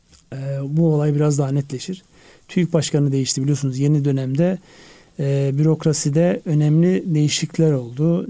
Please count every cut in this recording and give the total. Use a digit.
0